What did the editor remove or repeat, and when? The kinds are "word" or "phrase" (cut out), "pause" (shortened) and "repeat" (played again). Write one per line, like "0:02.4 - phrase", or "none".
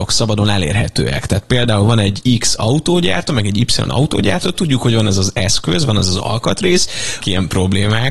0:07.2 - word